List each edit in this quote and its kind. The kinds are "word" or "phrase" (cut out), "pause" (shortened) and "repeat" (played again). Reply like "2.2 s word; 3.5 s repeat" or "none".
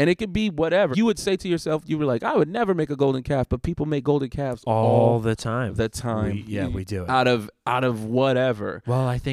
0.9 s word